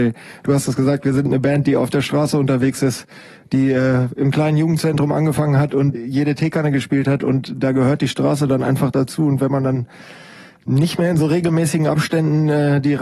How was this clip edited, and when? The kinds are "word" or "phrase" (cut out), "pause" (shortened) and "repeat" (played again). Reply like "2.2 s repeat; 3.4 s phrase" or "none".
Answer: 5.9 s word